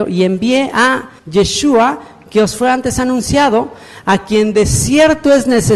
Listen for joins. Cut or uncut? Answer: cut